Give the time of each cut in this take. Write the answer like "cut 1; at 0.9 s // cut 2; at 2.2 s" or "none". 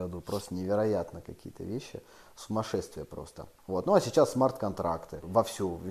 none